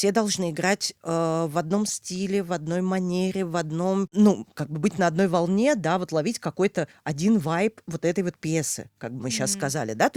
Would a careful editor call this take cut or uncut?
uncut